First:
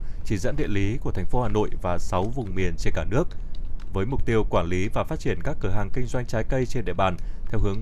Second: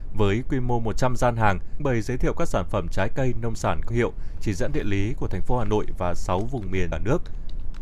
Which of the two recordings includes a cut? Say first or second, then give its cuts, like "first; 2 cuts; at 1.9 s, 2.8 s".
second; 3 cuts; at 1.8 s, 3.9 s, 6.9 s